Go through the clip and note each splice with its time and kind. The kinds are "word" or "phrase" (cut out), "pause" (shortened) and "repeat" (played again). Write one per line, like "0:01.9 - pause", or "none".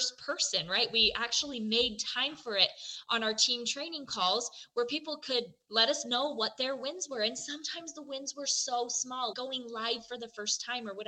0:09.3 - word